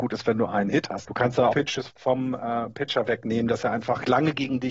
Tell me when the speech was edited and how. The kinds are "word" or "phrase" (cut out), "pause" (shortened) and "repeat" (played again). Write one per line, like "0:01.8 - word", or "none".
0:01.0 - word
0:01.5 - word
0:01.9 - word

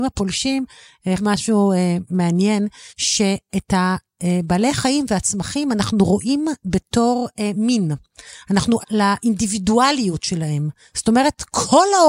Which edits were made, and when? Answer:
0:01.2 - phrase
0:02.9 - pause
0:08.8 - word

